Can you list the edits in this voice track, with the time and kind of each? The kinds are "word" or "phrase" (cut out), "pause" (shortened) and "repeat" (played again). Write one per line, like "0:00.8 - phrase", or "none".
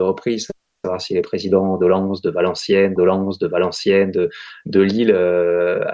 0:03.0 - repeat